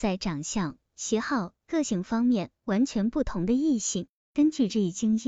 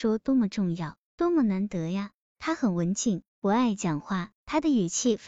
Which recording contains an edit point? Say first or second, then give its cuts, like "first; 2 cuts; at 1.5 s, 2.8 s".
second; 2 cuts; at 3.3 s, 4.4 s